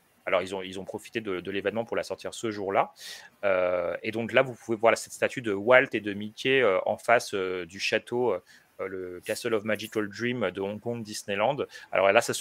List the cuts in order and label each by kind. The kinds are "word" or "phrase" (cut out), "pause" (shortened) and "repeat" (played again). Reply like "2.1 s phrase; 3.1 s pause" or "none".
none